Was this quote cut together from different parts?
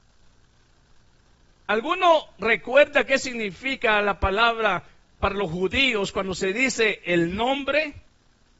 no; 0 cuts

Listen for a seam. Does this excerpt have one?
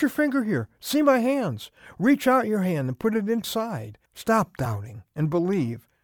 yes; 2 cuts; at 3.4 s, 4.1 s

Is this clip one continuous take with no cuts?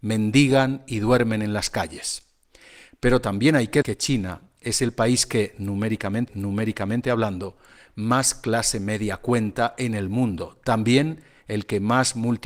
no; 2 cuts; at 3.8 s, 6.3 s

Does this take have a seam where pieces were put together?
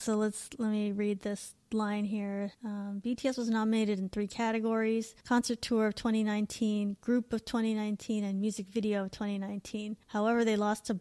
yes; 4 cuts; at 1.6 s, 2.5 s, 5.2 s, 10.0 s

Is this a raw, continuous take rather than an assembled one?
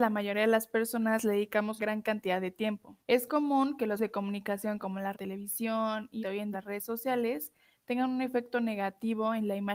no; 6 cuts; at 1.8 s, 3.0 s, 4.0 s, 5.1 s, 6.2 s, 6.5 s

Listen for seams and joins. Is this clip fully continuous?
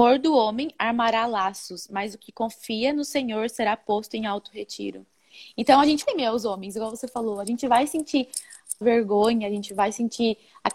no; 2 cuts; at 6.0 s, 8.8 s

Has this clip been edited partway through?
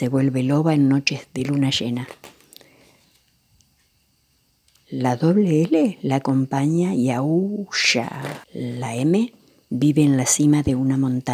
yes; 1 cut; at 8.4 s

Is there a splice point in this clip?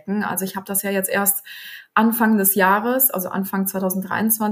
no; 0 cuts

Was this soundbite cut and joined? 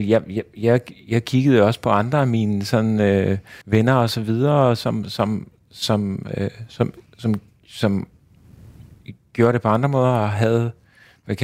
yes; 1 cut; at 3.6 s

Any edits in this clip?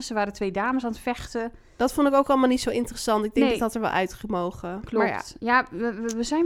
no; 0 cuts

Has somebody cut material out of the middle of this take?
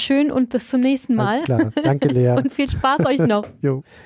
no; 0 cuts

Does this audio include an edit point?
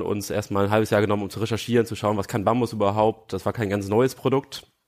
no; 0 cuts

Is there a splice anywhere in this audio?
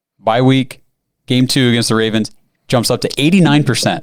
no; 0 cuts

